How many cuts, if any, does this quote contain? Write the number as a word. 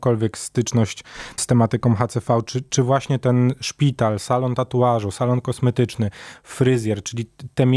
one